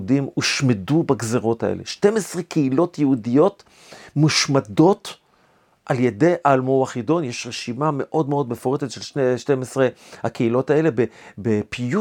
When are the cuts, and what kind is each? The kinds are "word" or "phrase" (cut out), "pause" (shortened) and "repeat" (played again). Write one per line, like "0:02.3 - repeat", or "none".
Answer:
none